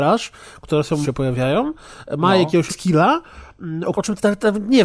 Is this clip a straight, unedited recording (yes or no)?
no